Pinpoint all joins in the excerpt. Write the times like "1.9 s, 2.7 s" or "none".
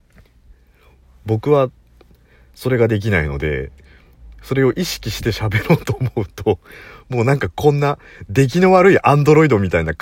none